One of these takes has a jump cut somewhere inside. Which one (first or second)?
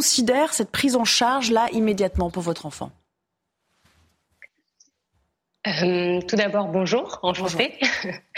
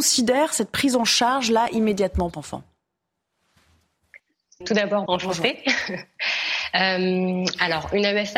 second